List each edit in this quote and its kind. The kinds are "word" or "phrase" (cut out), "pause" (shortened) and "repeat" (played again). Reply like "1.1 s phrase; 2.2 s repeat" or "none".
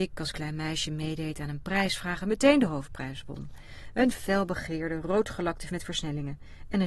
5.7 s word